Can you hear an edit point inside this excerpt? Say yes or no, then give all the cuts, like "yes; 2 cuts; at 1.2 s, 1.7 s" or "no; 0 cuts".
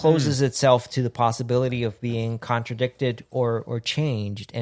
no; 0 cuts